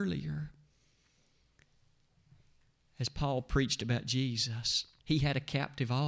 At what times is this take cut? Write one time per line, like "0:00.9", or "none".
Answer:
0:05.0